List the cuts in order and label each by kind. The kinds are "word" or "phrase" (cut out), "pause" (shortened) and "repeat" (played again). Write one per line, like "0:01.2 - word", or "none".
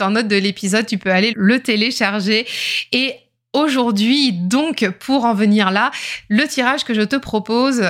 0:01.3 - word